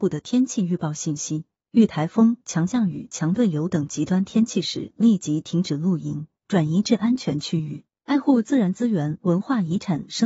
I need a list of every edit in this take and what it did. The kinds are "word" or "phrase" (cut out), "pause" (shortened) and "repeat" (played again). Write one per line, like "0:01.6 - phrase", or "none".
none